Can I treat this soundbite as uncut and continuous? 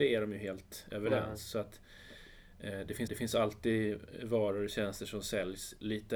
no; 1 cut; at 3.1 s

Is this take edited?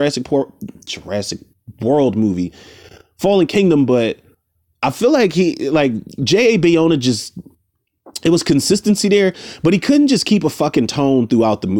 no; 0 cuts

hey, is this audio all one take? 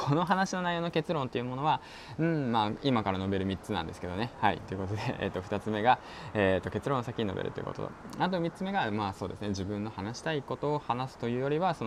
yes; 0 cuts

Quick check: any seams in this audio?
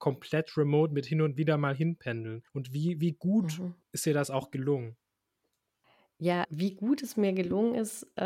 yes; 3 cuts; at 2.5 s, 3.8 s, 6.4 s

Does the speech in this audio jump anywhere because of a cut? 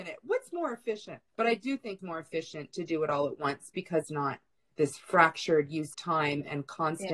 yes; 5 cuts; at 1.3 s, 2.0 s, 4.0 s, 4.7 s, 5.9 s

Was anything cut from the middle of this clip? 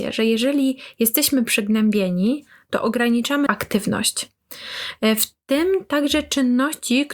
yes; 1 cut; at 3.5 s

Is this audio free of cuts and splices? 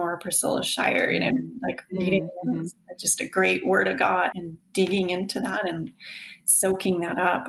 no; 1 cut; at 4.3 s

